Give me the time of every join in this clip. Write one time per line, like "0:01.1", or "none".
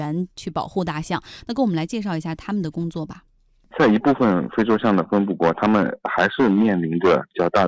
none